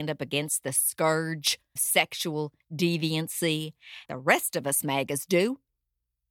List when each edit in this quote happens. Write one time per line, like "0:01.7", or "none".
0:01.8
0:04.1